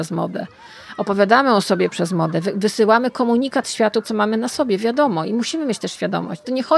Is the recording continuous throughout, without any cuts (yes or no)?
no